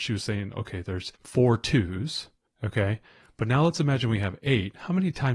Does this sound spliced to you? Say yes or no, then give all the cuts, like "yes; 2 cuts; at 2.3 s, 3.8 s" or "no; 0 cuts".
yes; 2 cuts; at 1.2 s, 2.5 s